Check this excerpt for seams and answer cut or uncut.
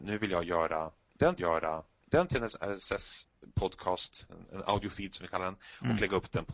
cut